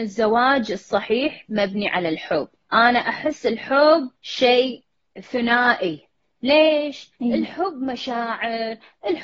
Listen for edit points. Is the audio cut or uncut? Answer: cut